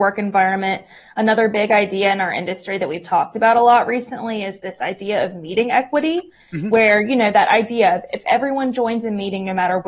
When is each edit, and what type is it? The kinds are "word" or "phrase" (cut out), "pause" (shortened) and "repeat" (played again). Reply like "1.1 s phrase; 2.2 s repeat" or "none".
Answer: none

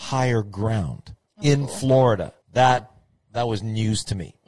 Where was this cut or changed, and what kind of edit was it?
1.3 s pause; 2.4 s pause

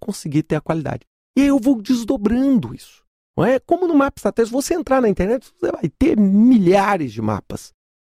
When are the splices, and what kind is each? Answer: none

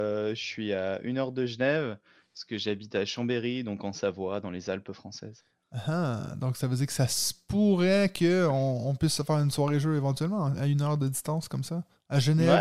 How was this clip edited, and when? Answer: none

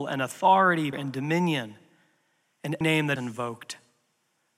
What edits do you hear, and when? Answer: 0.9 s word; 2.8 s word; 3.2 s word

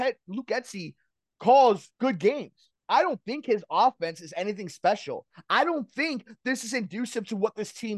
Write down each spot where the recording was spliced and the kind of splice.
1.9 s pause; 2.8 s pause

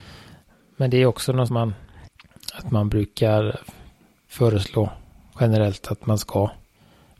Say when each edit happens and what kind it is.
1.5 s phrase; 5.8 s word

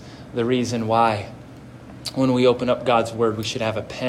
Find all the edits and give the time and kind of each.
none

